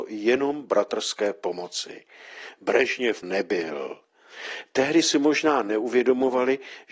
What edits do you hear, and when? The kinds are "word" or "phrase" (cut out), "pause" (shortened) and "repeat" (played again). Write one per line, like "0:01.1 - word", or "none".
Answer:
0:03.2 - phrase
0:05.0 - word